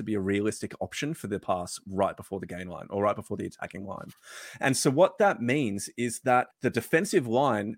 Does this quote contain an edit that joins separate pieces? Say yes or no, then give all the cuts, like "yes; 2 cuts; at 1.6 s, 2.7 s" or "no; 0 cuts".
yes; 1 cut; at 6.5 s